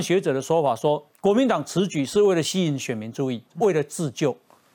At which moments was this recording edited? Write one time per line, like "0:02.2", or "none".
0:03.5